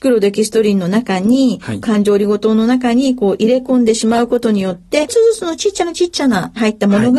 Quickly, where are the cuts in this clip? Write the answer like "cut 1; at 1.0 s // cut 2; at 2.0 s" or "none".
cut 1; at 5.1 s